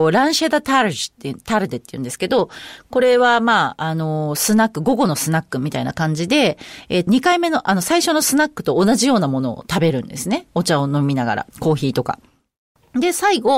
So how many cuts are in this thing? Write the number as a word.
two